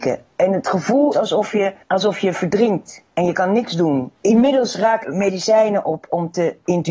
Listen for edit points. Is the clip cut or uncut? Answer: cut